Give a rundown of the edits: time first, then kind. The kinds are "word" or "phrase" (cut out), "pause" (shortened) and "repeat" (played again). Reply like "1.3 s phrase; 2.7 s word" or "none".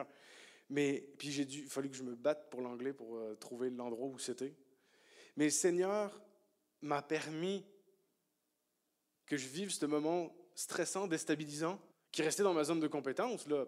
11.9 s pause